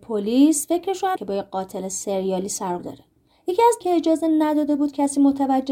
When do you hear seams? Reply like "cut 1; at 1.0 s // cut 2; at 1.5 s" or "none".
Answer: cut 1; at 1.2 s // cut 2; at 2.8 s // cut 3; at 3.8 s